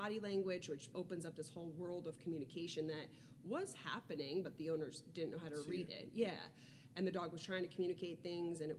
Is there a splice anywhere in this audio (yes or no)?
yes